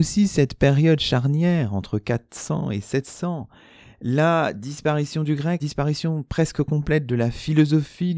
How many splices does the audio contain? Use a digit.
1